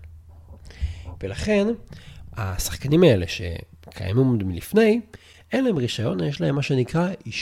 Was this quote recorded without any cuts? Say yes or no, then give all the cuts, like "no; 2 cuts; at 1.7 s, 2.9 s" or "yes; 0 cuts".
yes; 0 cuts